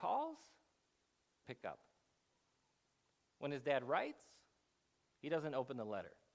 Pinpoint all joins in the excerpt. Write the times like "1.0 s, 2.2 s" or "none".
1.4 s